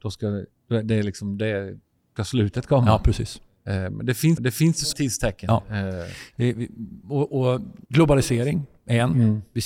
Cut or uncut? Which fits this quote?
cut